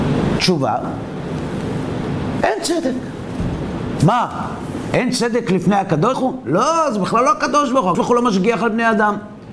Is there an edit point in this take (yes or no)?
yes